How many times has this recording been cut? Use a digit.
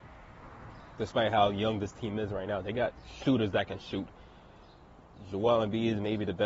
0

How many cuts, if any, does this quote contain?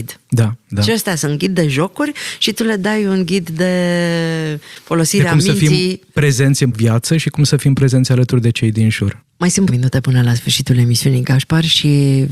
2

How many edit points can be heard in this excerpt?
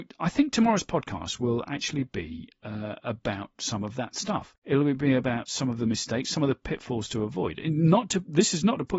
1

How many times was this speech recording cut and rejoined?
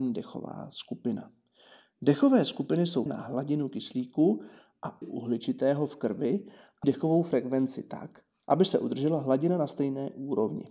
3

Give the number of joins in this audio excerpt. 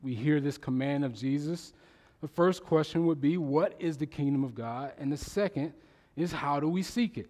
0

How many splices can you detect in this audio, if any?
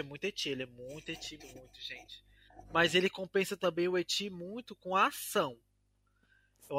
1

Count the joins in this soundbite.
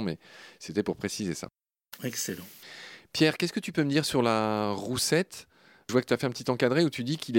1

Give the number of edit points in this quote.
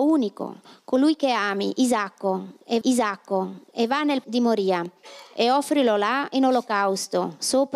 2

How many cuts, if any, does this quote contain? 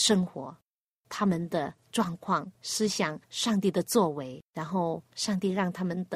4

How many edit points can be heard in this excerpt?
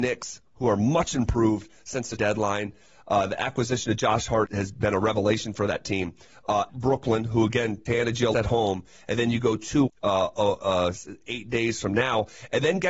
6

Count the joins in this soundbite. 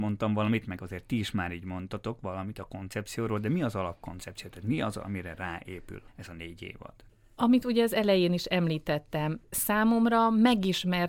0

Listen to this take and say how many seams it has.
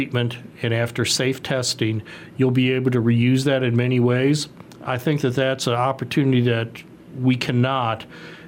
0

